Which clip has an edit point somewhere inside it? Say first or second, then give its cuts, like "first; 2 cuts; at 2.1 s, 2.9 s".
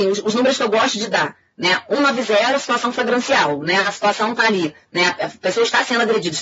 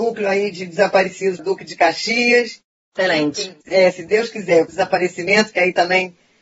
second; 3 cuts; at 1.4 s, 3.6 s, 4.7 s